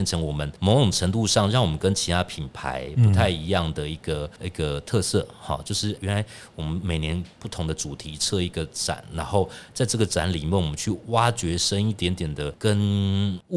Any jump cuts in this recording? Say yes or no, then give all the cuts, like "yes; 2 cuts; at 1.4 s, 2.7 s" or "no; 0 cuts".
yes; 1 cut; at 6.0 s